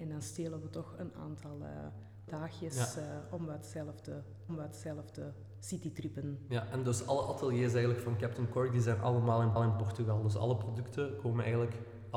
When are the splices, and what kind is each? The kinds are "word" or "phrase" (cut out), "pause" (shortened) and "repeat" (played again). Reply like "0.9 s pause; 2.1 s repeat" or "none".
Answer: 2.3 s word; 4.5 s repeat; 9.6 s repeat